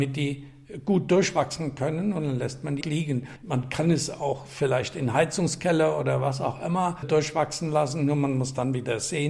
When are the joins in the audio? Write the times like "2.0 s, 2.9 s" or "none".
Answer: 2.8 s